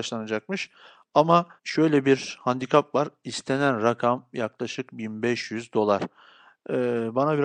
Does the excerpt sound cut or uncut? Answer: cut